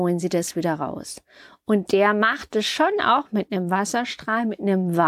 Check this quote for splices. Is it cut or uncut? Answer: uncut